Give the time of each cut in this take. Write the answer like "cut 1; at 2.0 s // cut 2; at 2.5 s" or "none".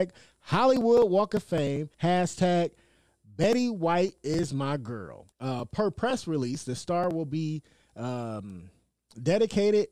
cut 1; at 1.9 s // cut 2; at 5.3 s